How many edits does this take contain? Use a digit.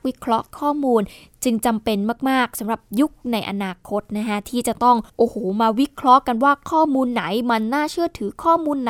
1